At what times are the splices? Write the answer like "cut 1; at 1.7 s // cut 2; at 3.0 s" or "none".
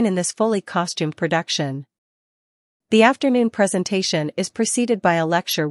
none